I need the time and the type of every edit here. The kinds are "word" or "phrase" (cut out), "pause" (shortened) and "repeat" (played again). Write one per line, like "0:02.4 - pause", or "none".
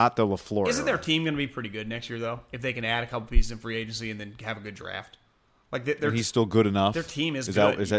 none